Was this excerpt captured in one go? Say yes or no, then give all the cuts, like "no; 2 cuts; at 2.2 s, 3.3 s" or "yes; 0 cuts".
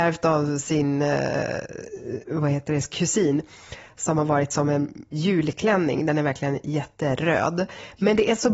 no; 1 cut; at 5.1 s